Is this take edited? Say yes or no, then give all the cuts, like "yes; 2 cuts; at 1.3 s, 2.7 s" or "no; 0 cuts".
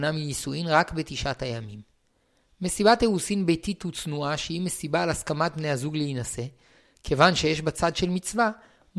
no; 0 cuts